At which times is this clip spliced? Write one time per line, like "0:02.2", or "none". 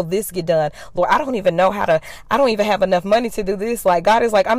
none